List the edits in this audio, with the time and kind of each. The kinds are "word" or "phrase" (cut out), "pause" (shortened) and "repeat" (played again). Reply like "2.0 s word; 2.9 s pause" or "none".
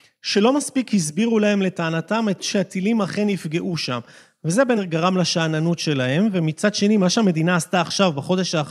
2.4 s word; 4.8 s word